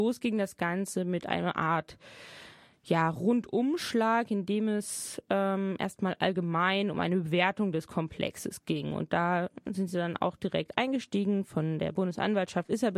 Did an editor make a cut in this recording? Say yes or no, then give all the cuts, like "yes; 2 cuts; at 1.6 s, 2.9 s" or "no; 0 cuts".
no; 0 cuts